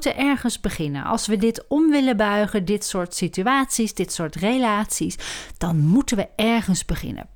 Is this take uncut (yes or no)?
yes